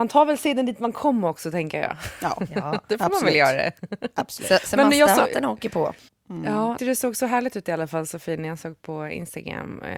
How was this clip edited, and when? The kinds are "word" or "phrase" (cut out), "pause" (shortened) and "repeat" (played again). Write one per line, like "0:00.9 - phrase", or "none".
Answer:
0:06.1 - pause
0:06.8 - phrase

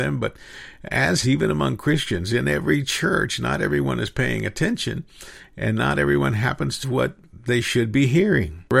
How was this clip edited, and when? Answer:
0:01.2 - word
0:06.8 - word

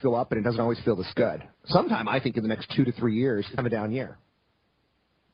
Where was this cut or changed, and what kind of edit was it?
0:01.5 - pause
0:03.6 - phrase

